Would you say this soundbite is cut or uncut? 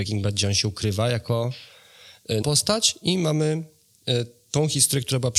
cut